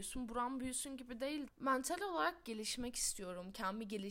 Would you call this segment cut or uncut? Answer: cut